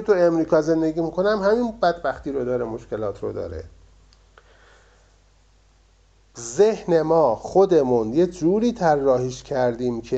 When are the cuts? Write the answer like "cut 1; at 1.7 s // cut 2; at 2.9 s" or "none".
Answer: none